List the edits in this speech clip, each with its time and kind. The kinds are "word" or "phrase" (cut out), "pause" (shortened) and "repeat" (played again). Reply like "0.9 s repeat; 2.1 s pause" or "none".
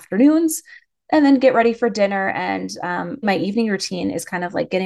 3.2 s word